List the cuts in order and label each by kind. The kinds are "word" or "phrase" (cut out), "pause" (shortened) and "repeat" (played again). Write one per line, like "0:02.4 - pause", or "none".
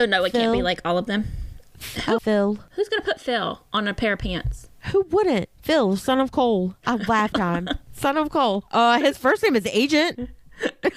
0:02.2 - word
0:07.3 - word